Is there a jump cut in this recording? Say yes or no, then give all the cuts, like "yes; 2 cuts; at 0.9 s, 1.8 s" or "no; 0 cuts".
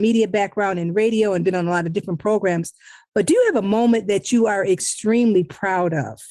no; 0 cuts